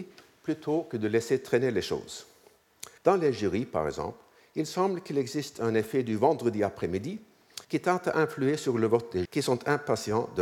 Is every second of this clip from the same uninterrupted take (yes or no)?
no